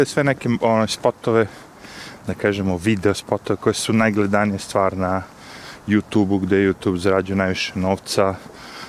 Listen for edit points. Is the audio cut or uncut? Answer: uncut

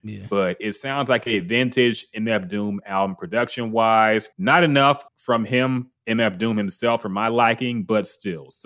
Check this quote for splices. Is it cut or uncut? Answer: cut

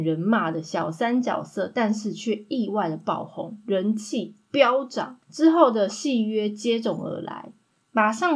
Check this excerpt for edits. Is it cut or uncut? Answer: cut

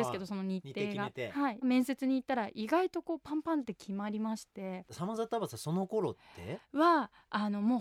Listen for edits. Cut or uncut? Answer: cut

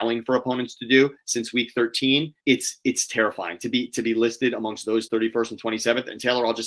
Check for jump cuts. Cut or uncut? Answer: cut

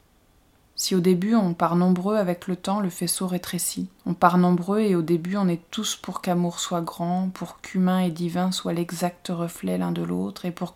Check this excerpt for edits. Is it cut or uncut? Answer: cut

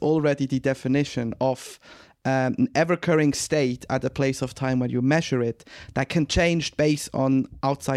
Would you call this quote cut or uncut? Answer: uncut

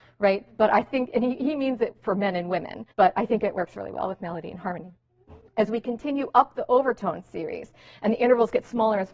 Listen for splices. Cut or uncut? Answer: cut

